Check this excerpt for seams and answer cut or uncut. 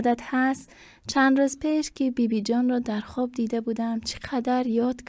uncut